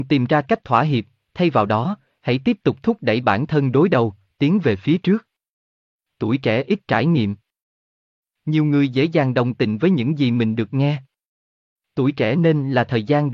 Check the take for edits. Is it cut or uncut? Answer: uncut